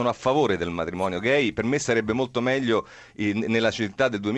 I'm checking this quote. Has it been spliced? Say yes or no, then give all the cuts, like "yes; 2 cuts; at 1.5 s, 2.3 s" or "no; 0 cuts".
no; 0 cuts